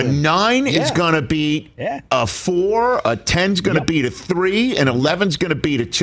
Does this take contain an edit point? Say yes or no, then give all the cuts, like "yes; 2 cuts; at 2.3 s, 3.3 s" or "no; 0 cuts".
no; 0 cuts